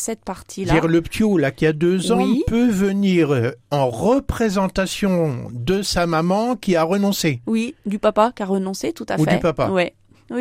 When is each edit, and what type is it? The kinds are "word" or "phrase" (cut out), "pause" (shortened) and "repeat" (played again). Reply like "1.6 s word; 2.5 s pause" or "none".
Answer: none